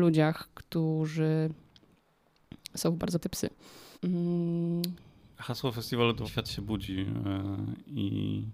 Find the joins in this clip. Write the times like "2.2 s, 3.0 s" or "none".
3.2 s, 3.9 s, 6.2 s

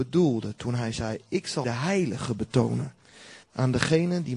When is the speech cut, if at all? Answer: 1.6 s, 3.4 s

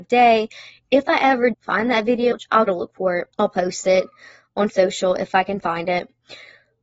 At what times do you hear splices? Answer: 1.5 s, 2.3 s, 2.7 s, 3.3 s, 4.7 s

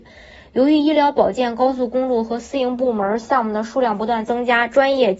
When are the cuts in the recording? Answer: none

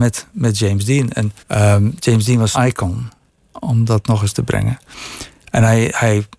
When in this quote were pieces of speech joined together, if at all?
1.4 s, 2.5 s, 4.3 s

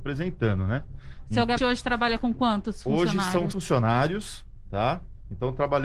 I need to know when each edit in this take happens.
1.6 s, 3.5 s

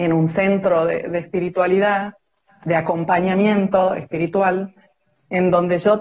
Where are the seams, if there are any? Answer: none

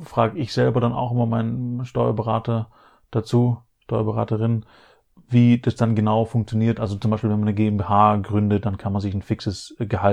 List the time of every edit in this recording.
none

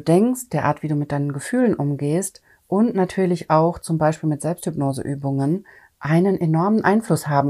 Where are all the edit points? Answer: none

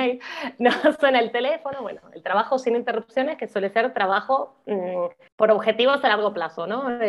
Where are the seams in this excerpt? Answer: 5.3 s

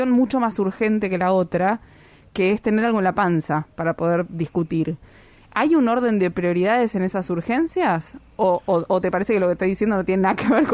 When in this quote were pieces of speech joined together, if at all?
none

